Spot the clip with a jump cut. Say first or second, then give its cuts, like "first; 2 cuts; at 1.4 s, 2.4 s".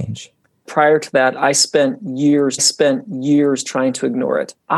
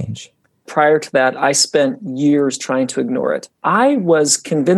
first; 1 cut; at 2.6 s